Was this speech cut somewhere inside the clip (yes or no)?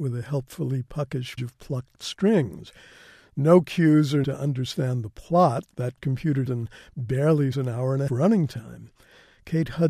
yes